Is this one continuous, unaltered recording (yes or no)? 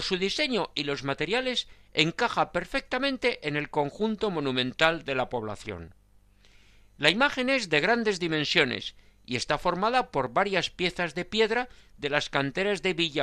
yes